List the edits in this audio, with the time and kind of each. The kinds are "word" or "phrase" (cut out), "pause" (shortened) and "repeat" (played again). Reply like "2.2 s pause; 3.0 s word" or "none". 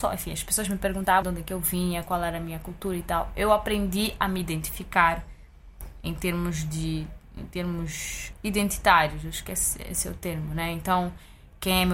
1.2 s word